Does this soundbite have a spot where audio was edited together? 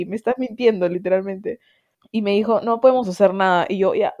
no; 0 cuts

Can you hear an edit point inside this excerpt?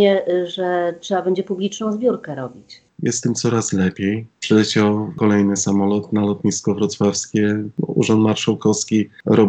no; 0 cuts

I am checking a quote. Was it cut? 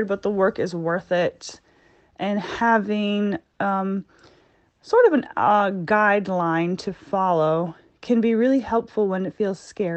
no; 0 cuts

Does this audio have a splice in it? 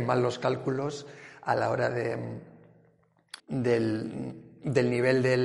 yes; 1 cut; at 3.4 s

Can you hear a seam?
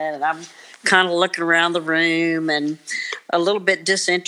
no; 0 cuts

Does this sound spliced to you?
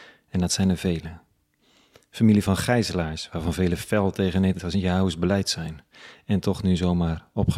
no; 0 cuts

